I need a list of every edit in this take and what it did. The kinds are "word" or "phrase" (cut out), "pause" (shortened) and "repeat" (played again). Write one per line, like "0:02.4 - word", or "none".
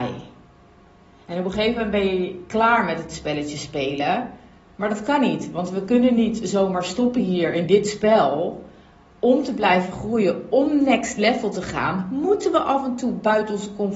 none